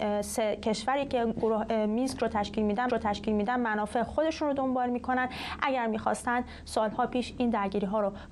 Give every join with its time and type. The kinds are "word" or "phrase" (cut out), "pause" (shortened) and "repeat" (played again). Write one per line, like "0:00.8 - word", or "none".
0:02.9 - repeat

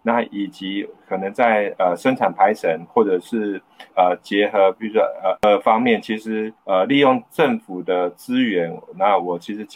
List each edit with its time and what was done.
0:03.9 - pause
0:05.4 - word
0:06.6 - pause

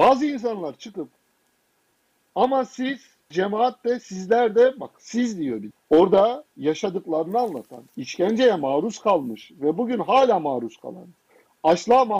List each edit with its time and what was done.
0:01.9 - pause
0:03.3 - word
0:05.7 - word
0:07.9 - pause

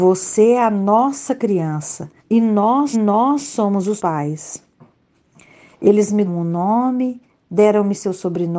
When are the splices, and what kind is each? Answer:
0:02.2 - pause
0:02.9 - repeat
0:04.0 - word
0:06.3 - word

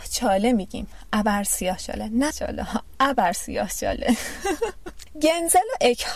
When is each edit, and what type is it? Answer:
0:02.3 - word

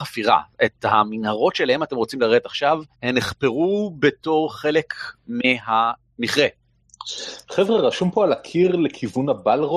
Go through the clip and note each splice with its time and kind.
0:02.9 - pause

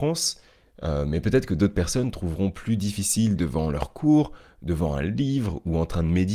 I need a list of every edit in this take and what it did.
0:03.4 - phrase

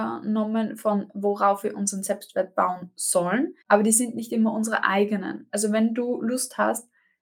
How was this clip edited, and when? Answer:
0:03.6 - pause

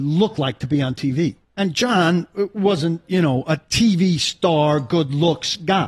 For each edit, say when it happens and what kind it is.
0:01.4 - pause
0:03.0 - word

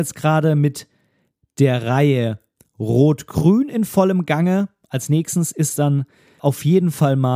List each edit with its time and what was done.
0:06.4 - word

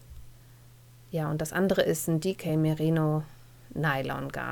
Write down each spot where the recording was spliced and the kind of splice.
none

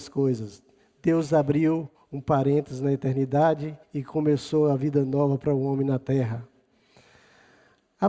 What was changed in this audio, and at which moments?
0:01.9 - pause
0:03.8 - pause

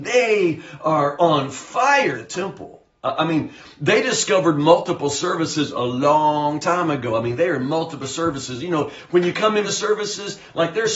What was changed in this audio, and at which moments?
0:02.1 - word
0:09.6 - word

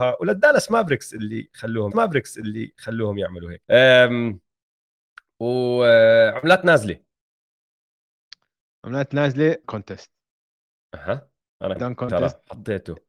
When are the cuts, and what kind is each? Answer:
0:01.9 - repeat
0:03.6 - word
0:09.6 - phrase
0:11.8 - word

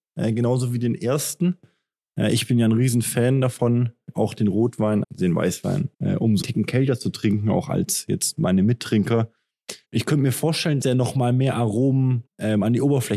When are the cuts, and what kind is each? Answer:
0:04.1 - word
0:05.0 - word
0:05.9 - pause
0:06.4 - phrase
0:09.8 - pause
0:10.8 - word
0:12.3 - pause

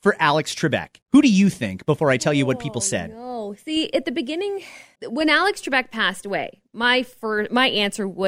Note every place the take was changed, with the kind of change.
0:01.0 - pause
0:04.9 - pause

